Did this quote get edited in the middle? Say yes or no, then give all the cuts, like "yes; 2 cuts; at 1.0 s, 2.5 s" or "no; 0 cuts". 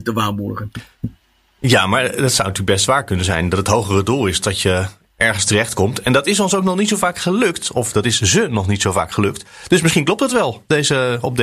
no; 0 cuts